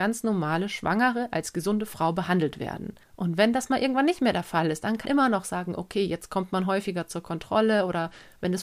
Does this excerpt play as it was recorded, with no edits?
no; 2 cuts; at 3.0 s, 5.1 s

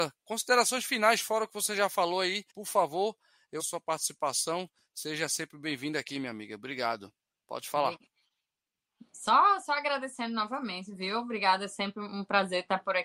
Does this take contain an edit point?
yes; 2 cuts; at 2.5 s, 3.6 s

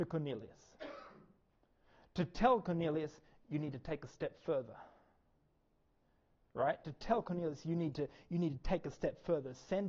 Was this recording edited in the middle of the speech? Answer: no; 0 cuts

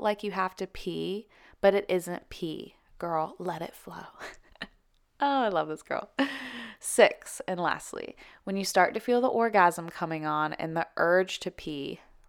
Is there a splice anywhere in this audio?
no; 0 cuts

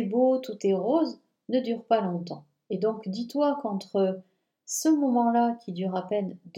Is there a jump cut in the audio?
no; 0 cuts

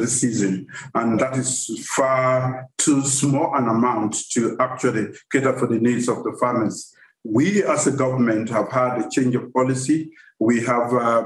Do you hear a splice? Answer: yes; 1 cut; at 1.2 s

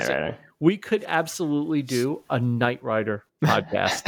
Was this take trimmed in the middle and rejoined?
no; 0 cuts

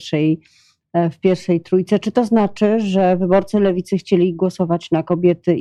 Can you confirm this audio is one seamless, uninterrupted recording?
yes; 0 cuts

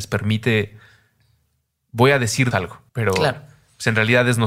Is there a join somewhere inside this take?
yes; 2 cuts; at 2.5 s, 2.9 s

